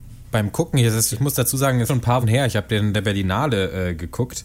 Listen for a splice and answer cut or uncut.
cut